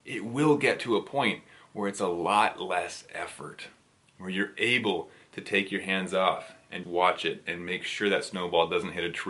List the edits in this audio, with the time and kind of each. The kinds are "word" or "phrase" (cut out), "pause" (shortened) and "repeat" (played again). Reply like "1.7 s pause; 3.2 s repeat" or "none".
6.8 s word